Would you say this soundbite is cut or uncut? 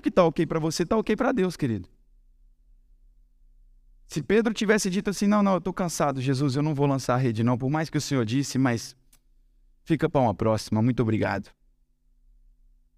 uncut